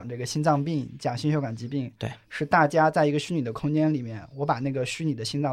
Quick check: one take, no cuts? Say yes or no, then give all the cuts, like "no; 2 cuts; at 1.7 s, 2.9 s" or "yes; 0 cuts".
yes; 0 cuts